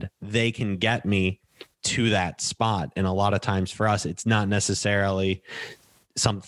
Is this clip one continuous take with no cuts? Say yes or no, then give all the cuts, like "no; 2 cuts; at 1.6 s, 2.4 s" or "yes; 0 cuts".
yes; 0 cuts